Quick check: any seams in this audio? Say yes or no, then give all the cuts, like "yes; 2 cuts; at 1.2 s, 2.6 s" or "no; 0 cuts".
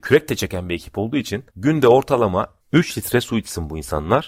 yes; 2 cuts; at 1.5 s, 2.6 s